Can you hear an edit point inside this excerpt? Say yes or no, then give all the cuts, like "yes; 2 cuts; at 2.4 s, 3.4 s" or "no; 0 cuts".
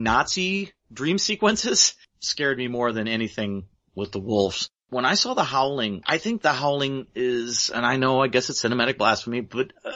yes; 1 cut; at 6.0 s